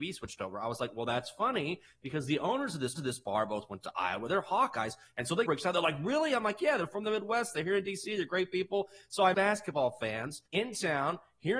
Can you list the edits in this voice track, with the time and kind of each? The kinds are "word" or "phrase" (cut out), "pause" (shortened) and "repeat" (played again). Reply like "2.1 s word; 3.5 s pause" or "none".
3.0 s repeat; 5.5 s phrase; 9.3 s phrase; 10.5 s pause